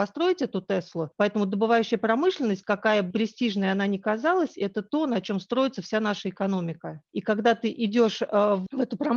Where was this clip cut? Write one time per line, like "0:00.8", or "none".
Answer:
0:03.1